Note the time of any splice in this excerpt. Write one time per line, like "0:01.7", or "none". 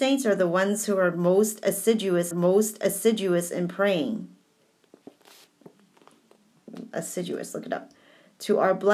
0:02.3